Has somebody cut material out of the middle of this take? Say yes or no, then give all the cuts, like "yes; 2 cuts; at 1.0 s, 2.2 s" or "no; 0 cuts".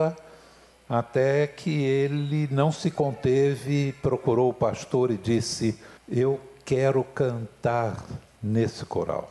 yes; 1 cut; at 6.0 s